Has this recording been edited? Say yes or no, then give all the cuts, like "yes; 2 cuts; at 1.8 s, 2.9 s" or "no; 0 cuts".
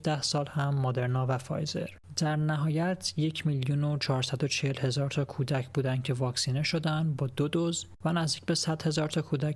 no; 0 cuts